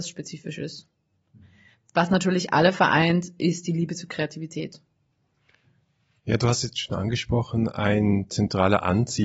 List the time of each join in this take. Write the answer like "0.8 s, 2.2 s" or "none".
none